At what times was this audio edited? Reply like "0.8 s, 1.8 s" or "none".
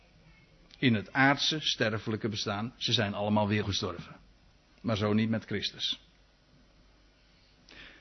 3.6 s, 4.5 s